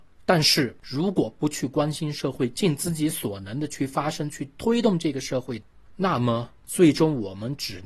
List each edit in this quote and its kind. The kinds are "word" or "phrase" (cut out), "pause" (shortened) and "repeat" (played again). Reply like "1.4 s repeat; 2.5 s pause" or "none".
none